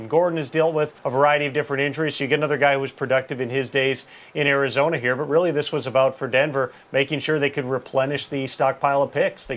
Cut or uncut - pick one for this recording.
cut